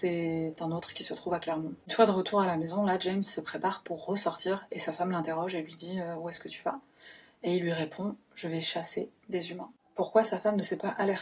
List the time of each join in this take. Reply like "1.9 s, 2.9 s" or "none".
none